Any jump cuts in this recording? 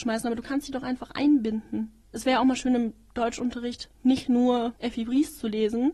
yes; 3 cuts; at 2.0 s, 3.9 s, 4.8 s

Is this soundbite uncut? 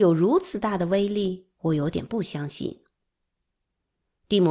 no; 1 cut; at 1.5 s

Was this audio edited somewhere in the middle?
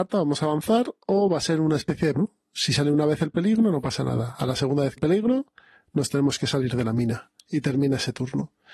yes; 3 cuts; at 2.1 s, 5.0 s, 7.4 s

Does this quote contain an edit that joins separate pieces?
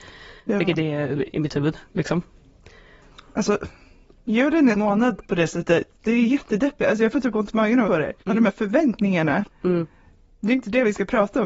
yes; 4 cuts; at 1.3 s, 4.7 s, 7.9 s, 8.2 s

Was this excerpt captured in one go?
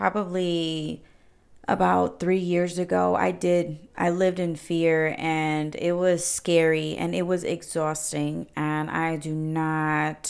yes; 0 cuts

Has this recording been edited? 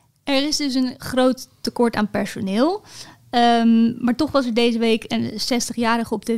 no; 0 cuts

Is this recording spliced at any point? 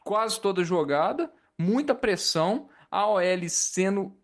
no; 0 cuts

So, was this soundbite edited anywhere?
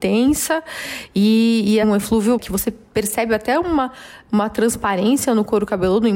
yes; 1 cut; at 1.8 s

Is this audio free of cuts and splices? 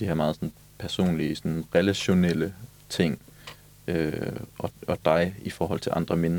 yes; 0 cuts

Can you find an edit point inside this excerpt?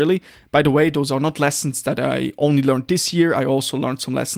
no; 0 cuts

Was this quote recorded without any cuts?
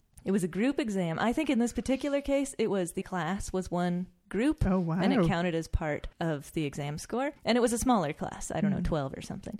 no; 3 cuts; at 3.0 s, 6.1 s, 7.4 s

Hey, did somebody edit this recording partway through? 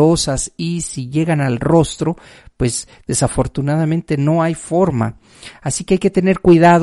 no; 0 cuts

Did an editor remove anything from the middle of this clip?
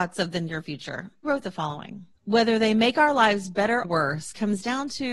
yes; 3 cuts; at 1.2 s, 2.1 s, 3.8 s

